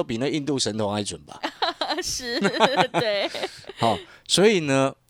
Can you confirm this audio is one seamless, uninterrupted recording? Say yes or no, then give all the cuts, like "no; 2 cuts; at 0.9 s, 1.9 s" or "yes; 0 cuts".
yes; 0 cuts